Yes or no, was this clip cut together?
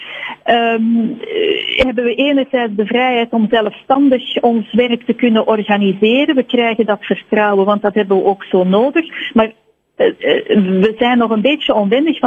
no